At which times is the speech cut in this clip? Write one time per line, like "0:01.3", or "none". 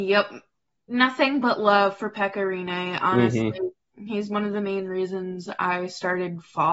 none